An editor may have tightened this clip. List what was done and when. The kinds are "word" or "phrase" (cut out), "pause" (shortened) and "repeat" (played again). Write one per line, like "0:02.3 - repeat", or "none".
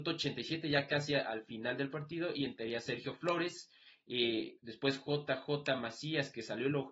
0:04.6 - pause

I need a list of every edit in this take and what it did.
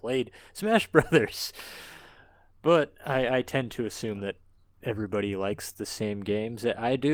none

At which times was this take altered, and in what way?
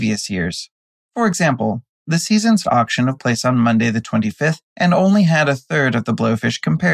0:02.6 - word
0:03.2 - phrase
0:04.7 - pause

